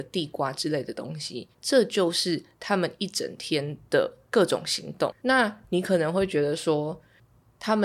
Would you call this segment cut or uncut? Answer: cut